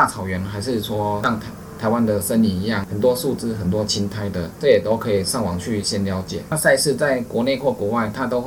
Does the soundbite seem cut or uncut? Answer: uncut